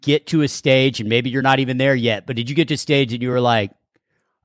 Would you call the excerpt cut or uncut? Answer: uncut